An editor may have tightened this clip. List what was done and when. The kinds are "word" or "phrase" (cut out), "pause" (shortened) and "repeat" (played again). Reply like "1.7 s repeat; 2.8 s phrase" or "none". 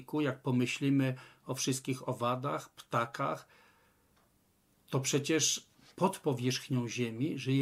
none